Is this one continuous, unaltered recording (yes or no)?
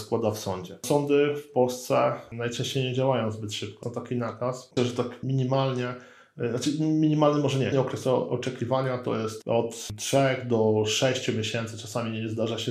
no